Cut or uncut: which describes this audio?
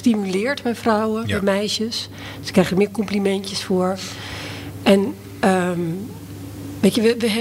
uncut